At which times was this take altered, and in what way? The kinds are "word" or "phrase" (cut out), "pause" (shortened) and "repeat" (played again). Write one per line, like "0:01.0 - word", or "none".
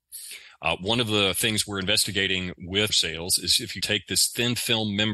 0:02.9 - word
0:03.8 - word